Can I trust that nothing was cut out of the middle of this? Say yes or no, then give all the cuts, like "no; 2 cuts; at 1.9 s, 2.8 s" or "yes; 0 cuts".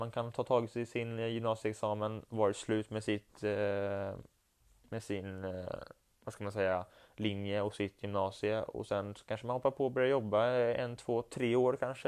yes; 0 cuts